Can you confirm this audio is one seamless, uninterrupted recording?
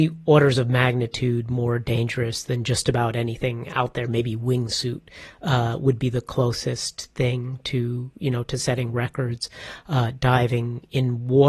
yes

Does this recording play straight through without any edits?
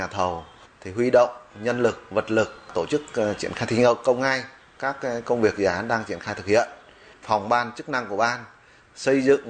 yes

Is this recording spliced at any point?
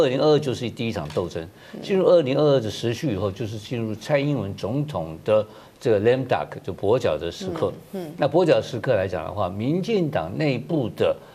no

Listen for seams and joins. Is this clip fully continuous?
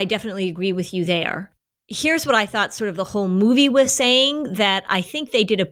yes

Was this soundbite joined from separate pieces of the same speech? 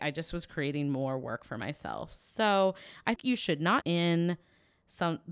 yes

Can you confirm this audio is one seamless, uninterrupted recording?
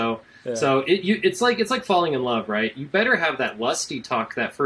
yes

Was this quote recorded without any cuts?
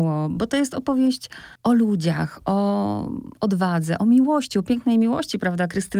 yes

